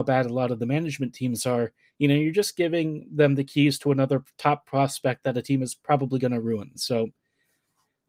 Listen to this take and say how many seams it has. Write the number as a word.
one